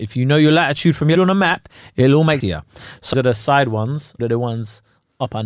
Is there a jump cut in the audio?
yes; 4 cuts; at 1.1 s, 2.4 s, 3.1 s, 4.2 s

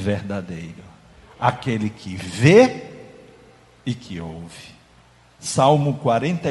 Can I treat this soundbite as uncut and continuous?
yes; 0 cuts

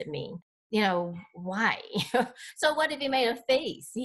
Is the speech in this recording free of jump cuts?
yes; 0 cuts

